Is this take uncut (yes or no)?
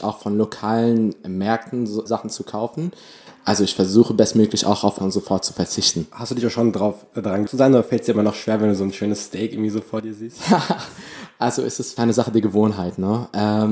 no